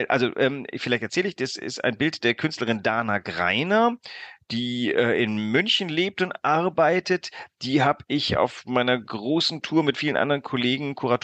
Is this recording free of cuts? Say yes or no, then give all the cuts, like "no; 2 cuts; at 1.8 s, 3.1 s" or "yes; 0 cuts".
yes; 0 cuts